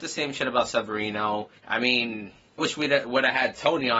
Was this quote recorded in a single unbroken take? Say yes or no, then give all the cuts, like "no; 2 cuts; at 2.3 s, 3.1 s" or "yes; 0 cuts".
no; 2 cuts; at 1.6 s, 2.6 s